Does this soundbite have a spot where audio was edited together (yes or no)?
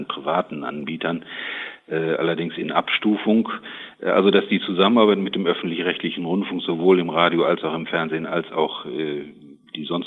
no